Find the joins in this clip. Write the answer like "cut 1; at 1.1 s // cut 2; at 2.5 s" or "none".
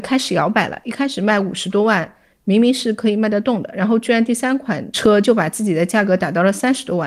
none